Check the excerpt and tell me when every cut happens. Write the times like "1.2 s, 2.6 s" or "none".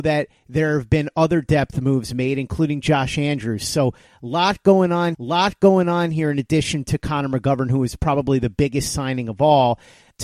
5.1 s